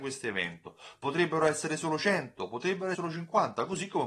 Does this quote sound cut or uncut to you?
cut